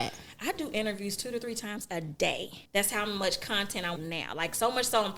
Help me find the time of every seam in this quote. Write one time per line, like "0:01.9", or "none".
0:02.7
0:04.0